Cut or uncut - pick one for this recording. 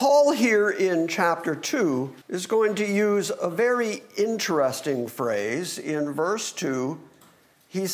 cut